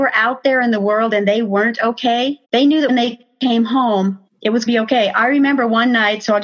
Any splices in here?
yes; 4 cuts; at 2.4 s, 2.9 s, 4.3 s, 4.7 s

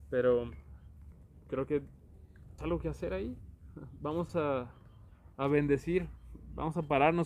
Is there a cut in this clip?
yes; 3 cuts; at 2.6 s, 4.3 s, 5.3 s

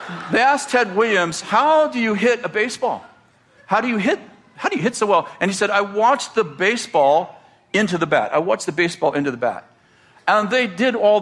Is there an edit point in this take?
no; 0 cuts

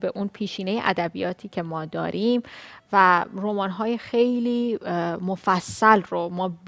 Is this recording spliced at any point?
no; 0 cuts

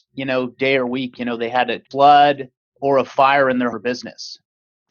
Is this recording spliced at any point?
yes; 1 cut; at 3.7 s

